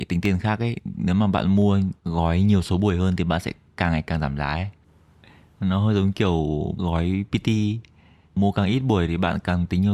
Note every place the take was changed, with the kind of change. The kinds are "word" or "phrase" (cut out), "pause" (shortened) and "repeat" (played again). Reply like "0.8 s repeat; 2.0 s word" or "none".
2.0 s pause; 6.7 s word